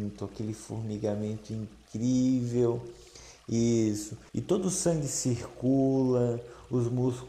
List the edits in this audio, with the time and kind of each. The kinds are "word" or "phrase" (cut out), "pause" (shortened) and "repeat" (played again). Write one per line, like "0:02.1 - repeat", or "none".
0:04.3 - pause